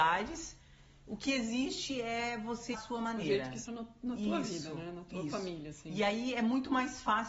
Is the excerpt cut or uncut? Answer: cut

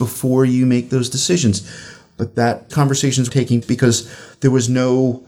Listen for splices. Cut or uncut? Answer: cut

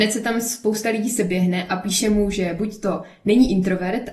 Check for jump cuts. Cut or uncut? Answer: uncut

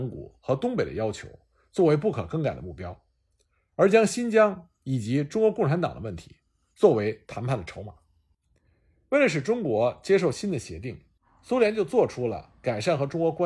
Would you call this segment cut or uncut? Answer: uncut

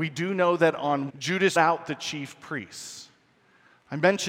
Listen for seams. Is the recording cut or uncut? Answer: cut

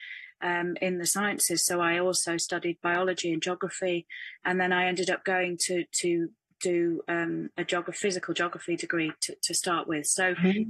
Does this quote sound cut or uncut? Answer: uncut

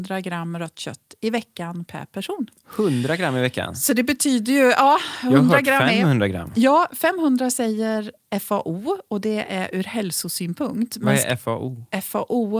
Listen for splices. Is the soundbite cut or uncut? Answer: uncut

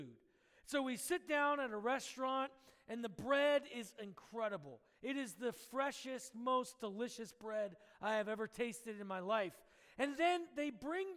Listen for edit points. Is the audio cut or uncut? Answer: uncut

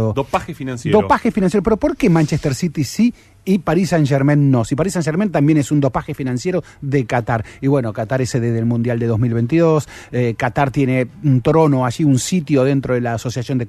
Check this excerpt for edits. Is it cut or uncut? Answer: uncut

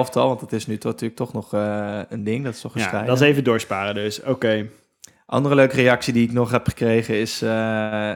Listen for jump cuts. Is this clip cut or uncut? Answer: uncut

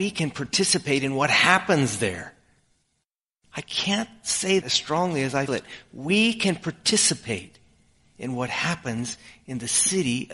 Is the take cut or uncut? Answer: cut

